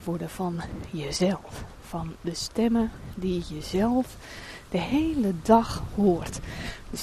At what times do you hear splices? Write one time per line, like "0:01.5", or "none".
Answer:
none